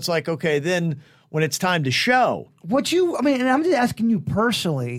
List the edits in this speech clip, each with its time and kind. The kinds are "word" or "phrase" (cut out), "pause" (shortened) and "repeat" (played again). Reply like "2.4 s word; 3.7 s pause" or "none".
none